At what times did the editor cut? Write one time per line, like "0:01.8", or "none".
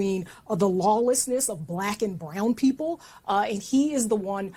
none